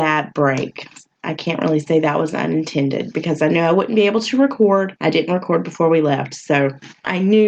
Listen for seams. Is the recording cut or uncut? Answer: uncut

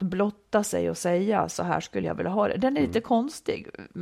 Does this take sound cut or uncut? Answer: uncut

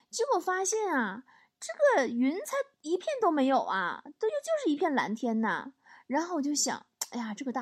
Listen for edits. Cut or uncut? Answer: uncut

